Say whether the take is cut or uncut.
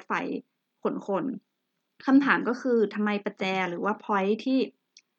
uncut